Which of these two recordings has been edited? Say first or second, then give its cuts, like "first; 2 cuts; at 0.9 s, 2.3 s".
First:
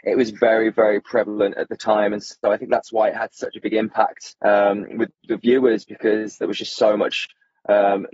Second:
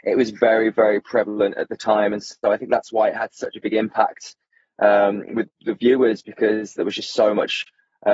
first; 1 cut; at 4.4 s